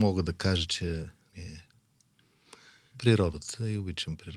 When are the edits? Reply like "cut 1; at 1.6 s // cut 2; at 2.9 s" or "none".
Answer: cut 1; at 1.3 s // cut 2; at 2.0 s // cut 3; at 2.9 s